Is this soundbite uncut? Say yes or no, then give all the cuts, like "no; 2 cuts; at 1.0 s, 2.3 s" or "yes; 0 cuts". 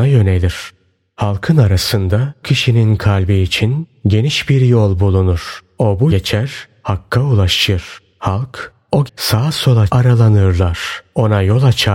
no; 4 cuts; at 2.4 s, 6.1 s, 9.1 s, 9.9 s